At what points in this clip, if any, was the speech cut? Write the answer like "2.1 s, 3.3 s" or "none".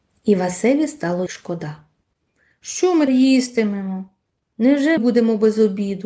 1.3 s, 3.1 s, 5.0 s